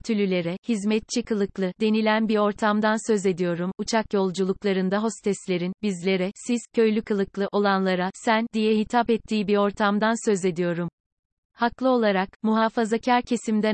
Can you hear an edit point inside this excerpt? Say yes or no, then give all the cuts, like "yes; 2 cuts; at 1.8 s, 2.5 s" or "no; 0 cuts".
no; 0 cuts